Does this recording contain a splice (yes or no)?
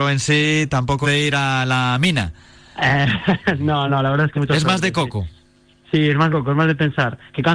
yes